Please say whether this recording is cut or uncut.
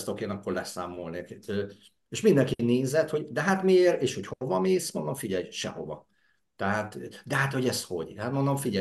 uncut